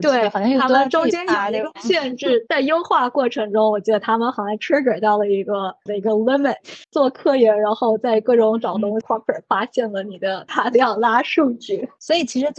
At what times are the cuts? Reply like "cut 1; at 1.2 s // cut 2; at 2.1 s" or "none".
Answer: cut 1; at 5.9 s // cut 2; at 6.8 s // cut 3; at 9.0 s